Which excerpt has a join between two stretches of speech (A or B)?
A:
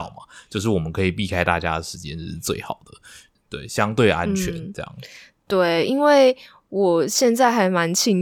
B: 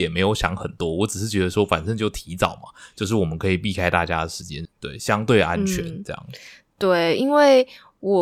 B